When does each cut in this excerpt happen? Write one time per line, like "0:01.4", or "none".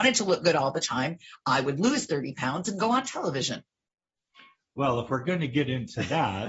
none